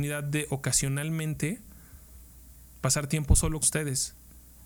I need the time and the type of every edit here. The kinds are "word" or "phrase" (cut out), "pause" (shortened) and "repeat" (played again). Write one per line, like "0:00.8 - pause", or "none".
0:03.6 - word